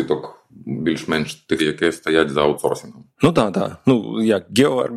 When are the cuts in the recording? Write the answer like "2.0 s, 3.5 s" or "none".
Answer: 1.6 s

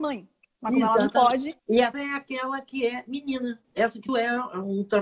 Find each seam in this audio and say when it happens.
1.6 s, 1.9 s, 3.6 s, 4.1 s

